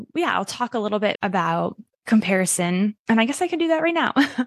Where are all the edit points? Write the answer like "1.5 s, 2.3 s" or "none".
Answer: 1.1 s, 3.0 s